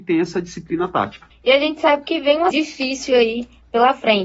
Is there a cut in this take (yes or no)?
yes